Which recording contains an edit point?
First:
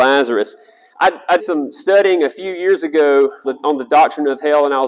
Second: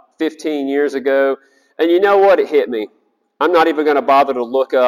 first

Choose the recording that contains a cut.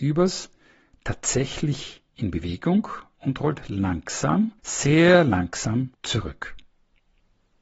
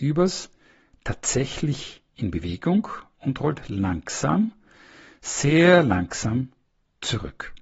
first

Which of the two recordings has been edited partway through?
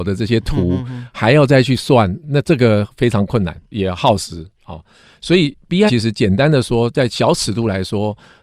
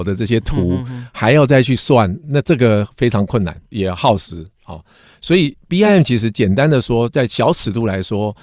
first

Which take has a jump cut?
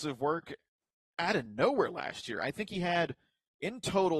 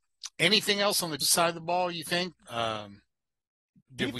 second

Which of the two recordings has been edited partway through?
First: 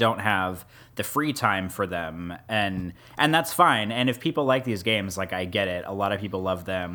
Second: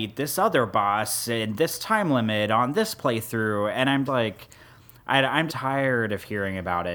second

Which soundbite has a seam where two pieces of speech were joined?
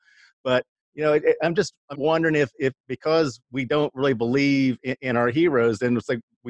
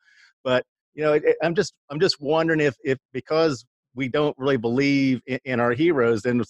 first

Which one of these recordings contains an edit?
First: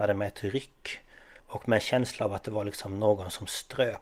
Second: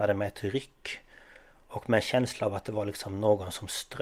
first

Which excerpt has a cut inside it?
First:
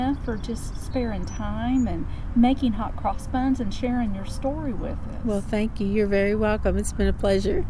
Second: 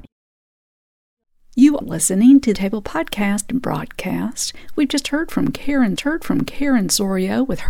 second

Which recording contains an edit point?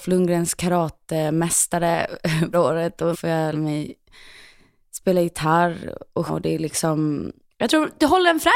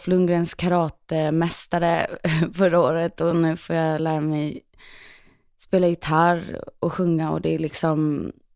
first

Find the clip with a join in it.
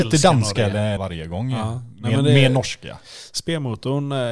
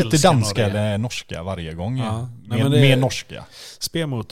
first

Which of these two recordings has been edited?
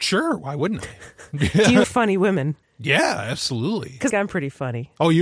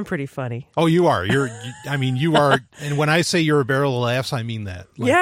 first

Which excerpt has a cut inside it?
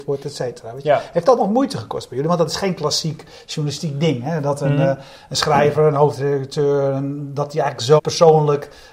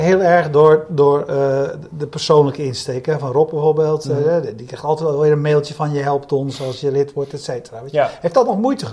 first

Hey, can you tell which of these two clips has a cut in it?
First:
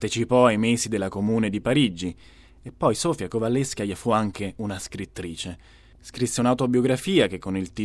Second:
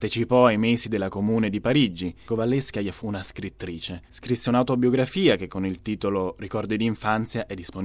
second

